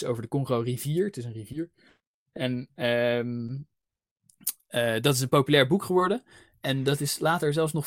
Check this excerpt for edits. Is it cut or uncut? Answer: uncut